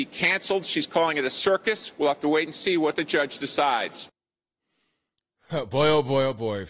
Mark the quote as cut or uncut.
uncut